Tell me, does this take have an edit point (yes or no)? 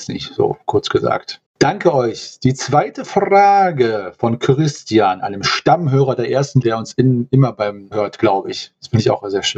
yes